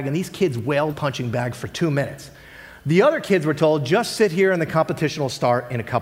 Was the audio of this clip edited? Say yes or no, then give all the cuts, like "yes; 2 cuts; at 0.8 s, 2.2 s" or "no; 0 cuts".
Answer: yes; 1 cut; at 0.9 s